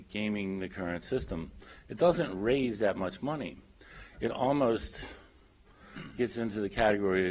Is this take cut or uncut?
uncut